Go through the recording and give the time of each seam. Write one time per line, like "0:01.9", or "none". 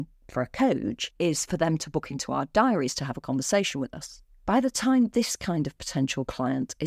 none